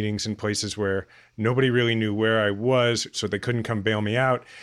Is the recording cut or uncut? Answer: uncut